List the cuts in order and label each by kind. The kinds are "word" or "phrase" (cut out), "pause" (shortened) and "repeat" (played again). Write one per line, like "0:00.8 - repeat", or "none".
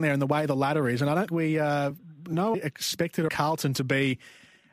0:01.3 - word
0:02.5 - phrase
0:03.3 - word